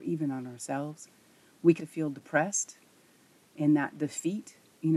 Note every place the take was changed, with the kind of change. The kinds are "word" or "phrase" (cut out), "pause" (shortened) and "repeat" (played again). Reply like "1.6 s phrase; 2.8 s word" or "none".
1.8 s word